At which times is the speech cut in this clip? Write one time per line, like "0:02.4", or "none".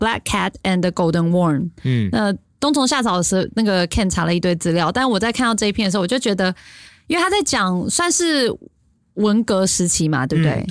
none